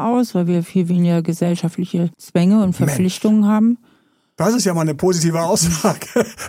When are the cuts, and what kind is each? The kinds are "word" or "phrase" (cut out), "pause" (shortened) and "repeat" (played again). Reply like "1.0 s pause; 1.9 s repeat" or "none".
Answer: 2.1 s pause

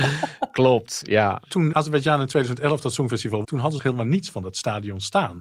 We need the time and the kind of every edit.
1.7 s word; 3.4 s word; 3.8 s word

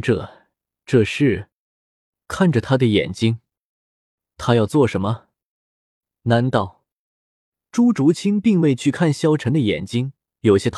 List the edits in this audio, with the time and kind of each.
none

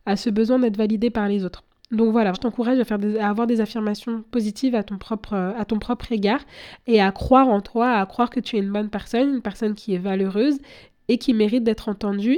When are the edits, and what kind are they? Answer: 2.3 s word

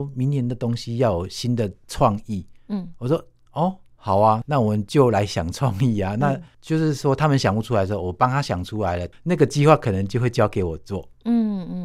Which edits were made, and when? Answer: 3.9 s pause

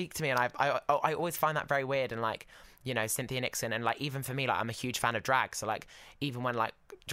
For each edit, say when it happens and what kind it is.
none

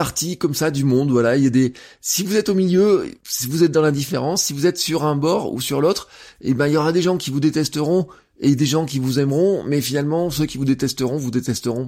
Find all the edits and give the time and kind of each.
3.2 s pause

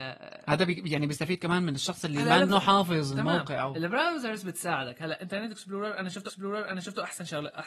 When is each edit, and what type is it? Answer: 2.5 s word; 6.3 s repeat

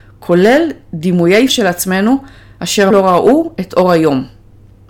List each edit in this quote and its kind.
1.5 s word; 2.9 s word

